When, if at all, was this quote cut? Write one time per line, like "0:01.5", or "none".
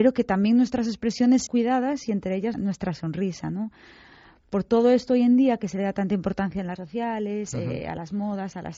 0:01.5
0:02.5
0:06.8